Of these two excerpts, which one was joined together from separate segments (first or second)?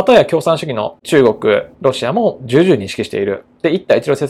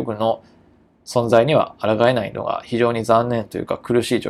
first